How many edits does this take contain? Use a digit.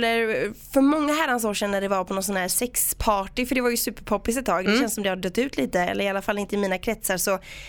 0